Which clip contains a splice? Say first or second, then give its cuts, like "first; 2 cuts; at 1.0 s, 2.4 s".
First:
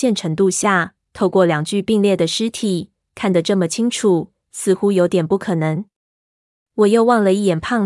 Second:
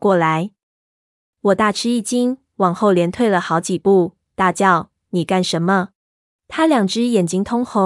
second; 1 cut; at 6.0 s